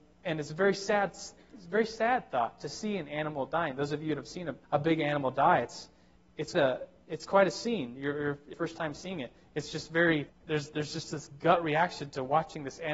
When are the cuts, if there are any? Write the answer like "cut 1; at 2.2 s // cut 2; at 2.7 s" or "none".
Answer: cut 1; at 4.6 s // cut 2; at 6.5 s // cut 3; at 8.5 s // cut 4; at 10.3 s